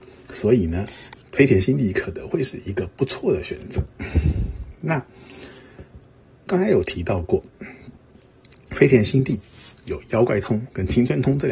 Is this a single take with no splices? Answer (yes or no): no